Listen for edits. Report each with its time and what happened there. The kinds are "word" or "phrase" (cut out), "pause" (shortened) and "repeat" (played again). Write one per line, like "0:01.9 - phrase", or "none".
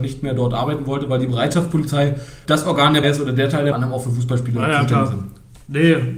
0:02.5 - word
0:03.0 - word
0:03.7 - phrase